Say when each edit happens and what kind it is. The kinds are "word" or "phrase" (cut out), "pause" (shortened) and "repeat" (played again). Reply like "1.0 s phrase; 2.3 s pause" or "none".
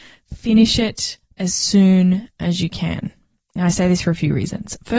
none